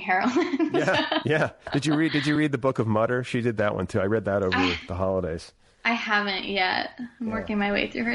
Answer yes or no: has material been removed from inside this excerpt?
no